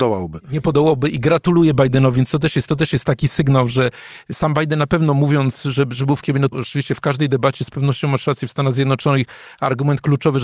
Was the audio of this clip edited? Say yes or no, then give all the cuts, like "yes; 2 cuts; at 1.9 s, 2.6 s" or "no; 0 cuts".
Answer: yes; 2 cuts; at 2.7 s, 6.5 s